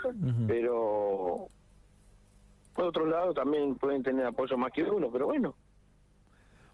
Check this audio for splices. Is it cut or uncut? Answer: uncut